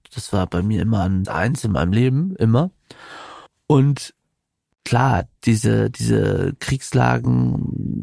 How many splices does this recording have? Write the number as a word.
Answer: three